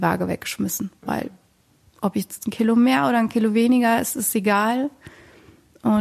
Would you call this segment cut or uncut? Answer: uncut